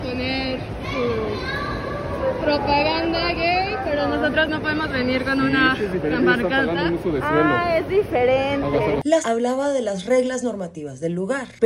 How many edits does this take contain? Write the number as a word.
one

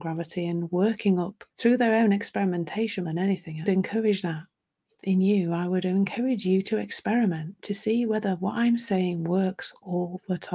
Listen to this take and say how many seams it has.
three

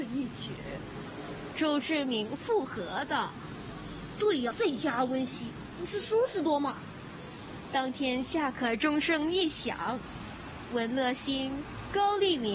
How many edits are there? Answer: one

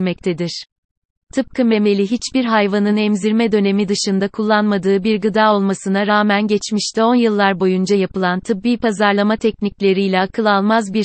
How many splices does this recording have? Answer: zero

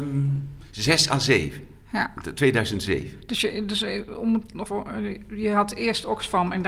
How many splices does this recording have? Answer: one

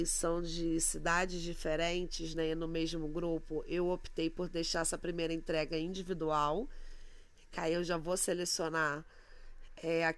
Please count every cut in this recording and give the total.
zero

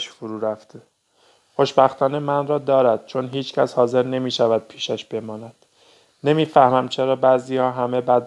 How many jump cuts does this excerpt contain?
zero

